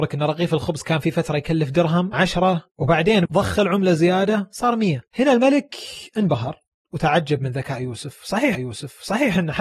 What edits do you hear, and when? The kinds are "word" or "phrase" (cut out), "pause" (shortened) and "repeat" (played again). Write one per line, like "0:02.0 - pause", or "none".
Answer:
0:02.1 - word
0:03.3 - word
0:05.1 - pause
0:06.8 - word
0:08.5 - repeat

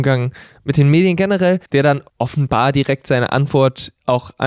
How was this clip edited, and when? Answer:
0:01.7 - pause
0:02.1 - pause

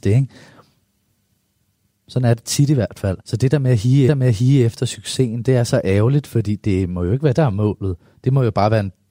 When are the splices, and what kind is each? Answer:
0:03.2 - pause
0:04.1 - repeat
0:07.3 - word

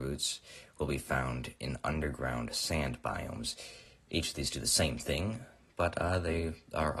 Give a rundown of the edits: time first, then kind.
none

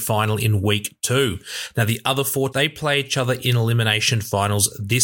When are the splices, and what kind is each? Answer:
0:02.5 - word

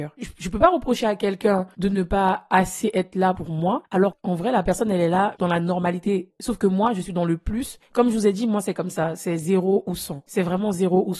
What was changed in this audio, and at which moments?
0:05.4 - word

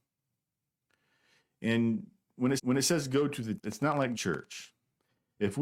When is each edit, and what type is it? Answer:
0:02.6 - repeat
0:03.6 - word
0:04.1 - phrase

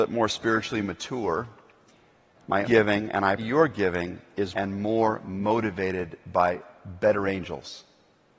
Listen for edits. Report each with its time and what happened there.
0:02.6 - word
0:03.4 - word
0:04.5 - word

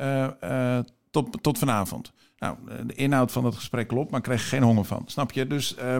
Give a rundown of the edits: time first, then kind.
none

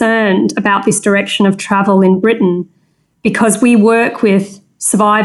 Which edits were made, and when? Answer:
none

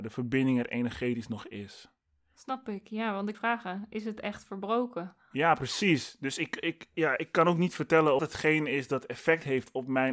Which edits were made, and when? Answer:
0:02.0 - pause
0:03.3 - phrase
0:08.2 - phrase

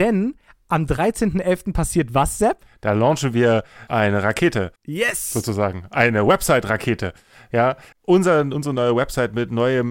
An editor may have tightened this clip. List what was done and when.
0:03.9 - word
0:04.8 - pause
0:07.9 - word

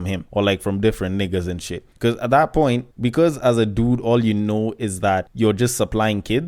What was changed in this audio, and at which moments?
0:01.9 - pause

